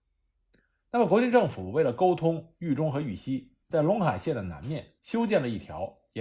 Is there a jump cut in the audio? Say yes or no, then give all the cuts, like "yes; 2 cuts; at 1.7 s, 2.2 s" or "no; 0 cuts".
yes; 2 cuts; at 3.6 s, 5.0 s